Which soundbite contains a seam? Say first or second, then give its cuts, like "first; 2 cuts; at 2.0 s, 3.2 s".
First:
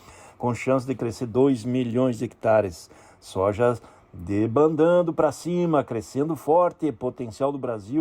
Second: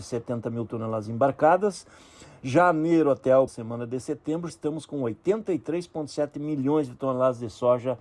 second; 2 cuts; at 3.5 s, 4.5 s